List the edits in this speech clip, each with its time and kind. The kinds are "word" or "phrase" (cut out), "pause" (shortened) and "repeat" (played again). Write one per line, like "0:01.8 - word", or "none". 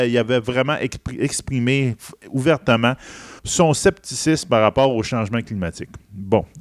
0:03.4 - pause